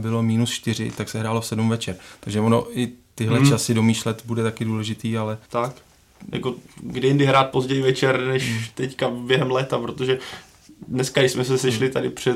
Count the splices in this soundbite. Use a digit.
1